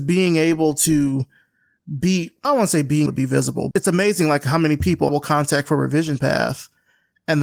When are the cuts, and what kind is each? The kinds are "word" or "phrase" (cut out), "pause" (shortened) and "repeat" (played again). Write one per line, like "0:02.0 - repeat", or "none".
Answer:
0:02.4 - word
0:03.1 - word
0:03.7 - word
0:05.1 - word